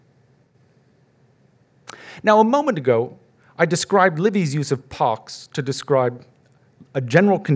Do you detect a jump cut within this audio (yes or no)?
no